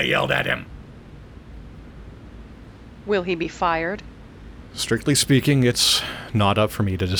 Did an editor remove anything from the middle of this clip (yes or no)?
no